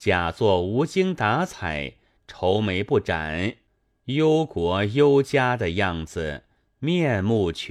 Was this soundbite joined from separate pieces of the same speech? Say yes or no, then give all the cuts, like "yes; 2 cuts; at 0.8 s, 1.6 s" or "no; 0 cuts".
no; 0 cuts